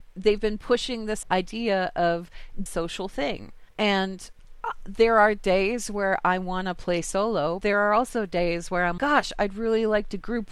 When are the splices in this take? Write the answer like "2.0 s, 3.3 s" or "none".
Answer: 1.2 s, 2.7 s, 3.7 s, 7.6 s, 9.0 s

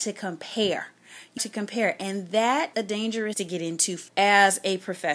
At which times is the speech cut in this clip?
1.4 s, 2.7 s, 3.3 s, 4.1 s

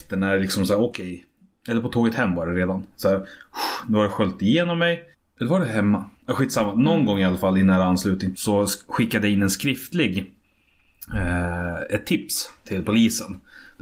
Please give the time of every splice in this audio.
5.1 s, 6.2 s, 8.3 s

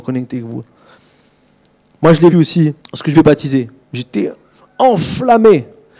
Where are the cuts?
2.3 s, 2.8 s, 3.1 s

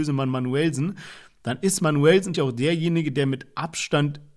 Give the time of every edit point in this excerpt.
2.3 s

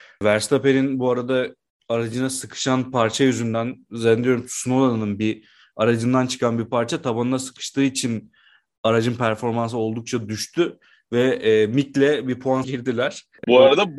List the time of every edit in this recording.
12.6 s

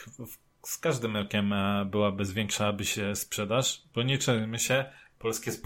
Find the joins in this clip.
none

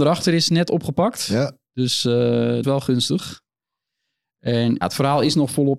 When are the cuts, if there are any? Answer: 2.6 s, 4.8 s

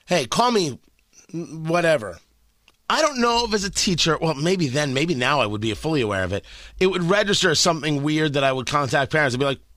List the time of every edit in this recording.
none

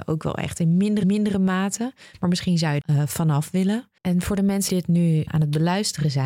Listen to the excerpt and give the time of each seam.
1.0 s, 2.8 s, 4.0 s, 4.7 s, 5.3 s

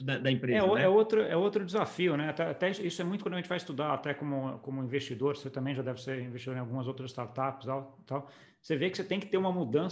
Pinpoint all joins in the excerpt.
none

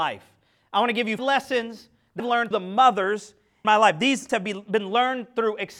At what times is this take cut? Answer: 1.2 s, 2.2 s, 2.5 s, 3.6 s, 4.3 s

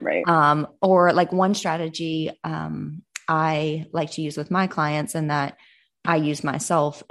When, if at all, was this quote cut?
none

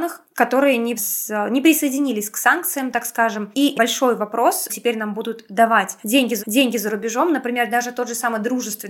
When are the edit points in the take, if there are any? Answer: 1.0 s, 3.7 s, 4.7 s, 6.4 s

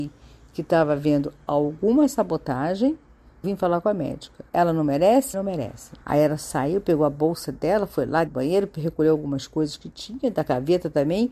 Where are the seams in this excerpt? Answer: 3.4 s, 4.5 s, 5.3 s, 6.0 s, 8.3 s

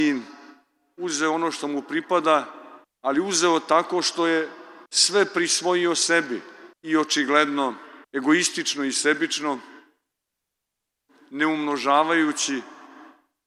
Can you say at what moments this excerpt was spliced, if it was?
2.8 s, 4.9 s, 6.7 s, 8.0 s

